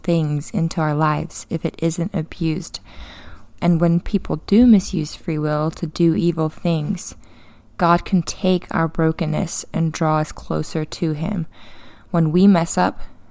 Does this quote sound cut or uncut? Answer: uncut